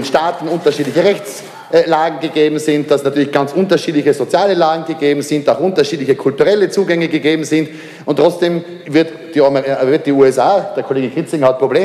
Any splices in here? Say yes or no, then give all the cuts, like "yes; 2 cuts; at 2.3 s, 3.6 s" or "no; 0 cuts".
no; 0 cuts